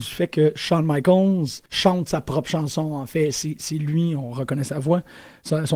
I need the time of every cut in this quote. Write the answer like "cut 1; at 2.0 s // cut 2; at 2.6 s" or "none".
cut 1; at 1.7 s